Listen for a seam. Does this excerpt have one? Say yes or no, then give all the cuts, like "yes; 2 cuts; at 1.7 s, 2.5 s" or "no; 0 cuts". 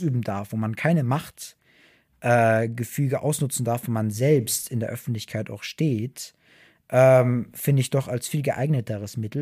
no; 0 cuts